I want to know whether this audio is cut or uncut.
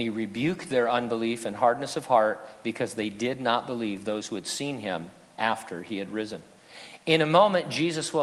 uncut